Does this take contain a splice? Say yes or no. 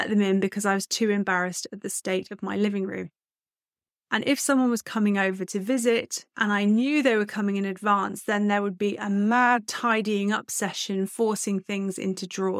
no